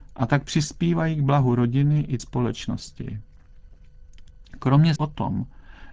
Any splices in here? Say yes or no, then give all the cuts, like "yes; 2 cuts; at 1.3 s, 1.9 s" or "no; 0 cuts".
yes; 2 cuts; at 2.2 s, 5.0 s